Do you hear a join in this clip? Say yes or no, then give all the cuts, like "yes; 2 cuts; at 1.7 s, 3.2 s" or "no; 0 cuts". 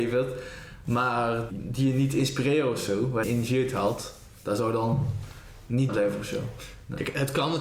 yes; 3 cuts; at 1.5 s, 3.2 s, 5.9 s